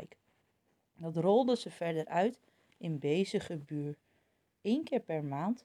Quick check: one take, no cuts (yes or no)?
yes